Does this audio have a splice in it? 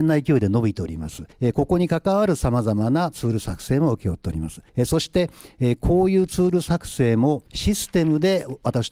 yes; 3 cuts; at 1.3 s, 4.7 s, 7.5 s

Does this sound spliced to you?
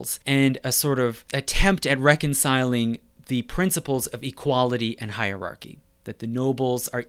no; 0 cuts

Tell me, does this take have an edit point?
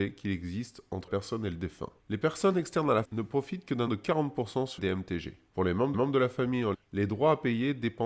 yes; 8 cuts; at 1.1 s, 2.0 s, 3.0 s, 3.9 s, 4.8 s, 5.5 s, 5.9 s, 6.7 s

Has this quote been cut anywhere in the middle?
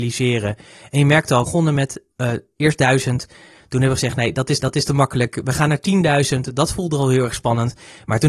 yes; 3 cuts; at 1.5 s, 2.1 s, 4.6 s

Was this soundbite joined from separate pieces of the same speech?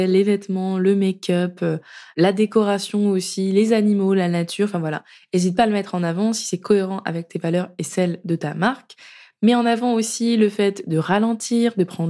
no; 0 cuts

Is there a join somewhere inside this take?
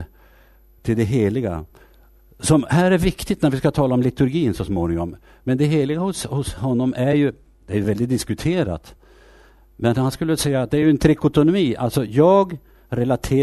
no; 0 cuts

